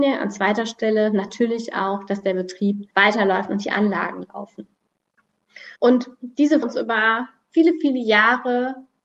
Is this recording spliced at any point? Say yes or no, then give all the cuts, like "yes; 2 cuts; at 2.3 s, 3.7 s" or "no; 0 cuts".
yes; 3 cuts; at 2.9 s, 5.8 s, 6.6 s